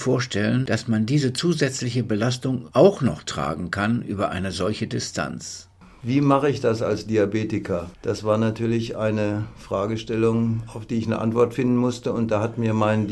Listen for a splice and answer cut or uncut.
uncut